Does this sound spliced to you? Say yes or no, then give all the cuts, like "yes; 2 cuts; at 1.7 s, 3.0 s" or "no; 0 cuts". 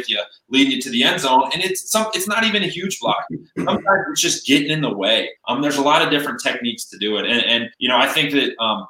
yes; 2 cuts; at 5.4 s, 7.7 s